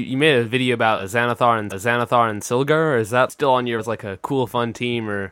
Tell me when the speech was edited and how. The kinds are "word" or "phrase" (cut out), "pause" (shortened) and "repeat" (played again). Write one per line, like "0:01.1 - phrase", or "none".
0:01.7 - repeat
0:03.8 - word